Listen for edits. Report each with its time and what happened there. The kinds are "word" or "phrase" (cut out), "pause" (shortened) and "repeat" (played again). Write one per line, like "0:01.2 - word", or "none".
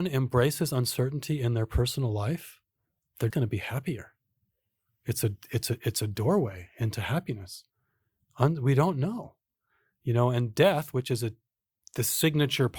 0:03.3 - word